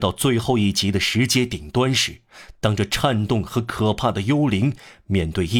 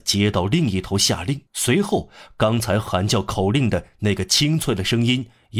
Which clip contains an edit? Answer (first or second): second